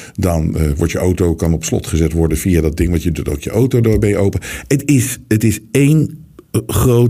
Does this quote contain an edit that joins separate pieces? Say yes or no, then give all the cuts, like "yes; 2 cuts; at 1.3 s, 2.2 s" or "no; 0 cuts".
no; 0 cuts